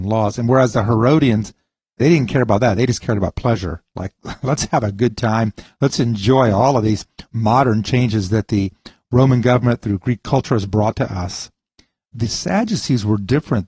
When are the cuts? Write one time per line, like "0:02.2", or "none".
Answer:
none